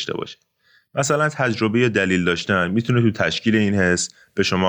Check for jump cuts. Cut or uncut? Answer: uncut